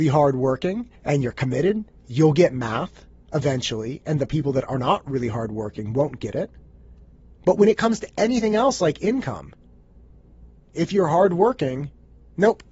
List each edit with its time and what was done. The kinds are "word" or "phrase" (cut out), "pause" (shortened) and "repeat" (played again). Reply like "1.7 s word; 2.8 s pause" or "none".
1.0 s pause; 7.4 s pause; 10.6 s pause